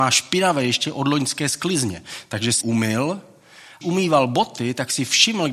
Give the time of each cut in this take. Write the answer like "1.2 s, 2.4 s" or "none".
2.6 s, 3.8 s